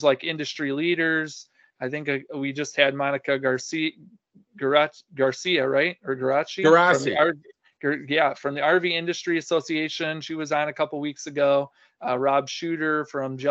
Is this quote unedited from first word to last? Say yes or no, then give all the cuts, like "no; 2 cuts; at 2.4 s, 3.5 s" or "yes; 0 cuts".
yes; 0 cuts